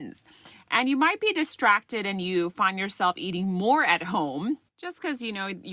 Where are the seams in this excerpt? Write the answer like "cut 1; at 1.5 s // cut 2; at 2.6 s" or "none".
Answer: cut 1; at 4.7 s